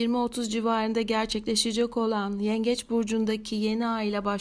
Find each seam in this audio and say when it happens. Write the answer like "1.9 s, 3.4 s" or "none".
none